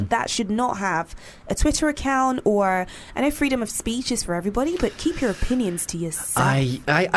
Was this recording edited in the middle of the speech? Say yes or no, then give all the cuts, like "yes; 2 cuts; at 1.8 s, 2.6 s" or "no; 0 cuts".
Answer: no; 0 cuts